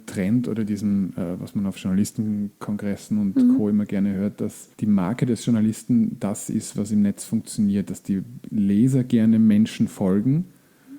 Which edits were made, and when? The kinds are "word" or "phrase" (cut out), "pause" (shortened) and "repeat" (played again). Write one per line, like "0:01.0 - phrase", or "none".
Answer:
0:04.7 - pause